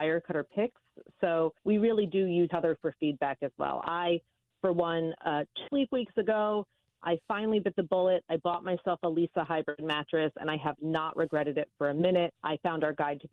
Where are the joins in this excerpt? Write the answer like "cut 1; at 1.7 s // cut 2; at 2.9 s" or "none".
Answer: cut 1; at 1.6 s // cut 2; at 2.5 s // cut 3; at 5.7 s // cut 4; at 12.4 s